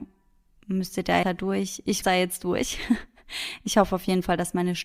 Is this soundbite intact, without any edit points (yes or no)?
no